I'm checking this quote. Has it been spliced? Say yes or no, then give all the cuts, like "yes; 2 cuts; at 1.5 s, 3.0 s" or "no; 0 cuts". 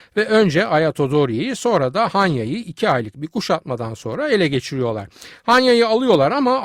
no; 0 cuts